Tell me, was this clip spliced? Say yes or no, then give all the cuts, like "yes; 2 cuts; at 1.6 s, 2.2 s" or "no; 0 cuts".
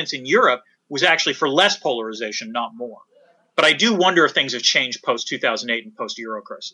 no; 0 cuts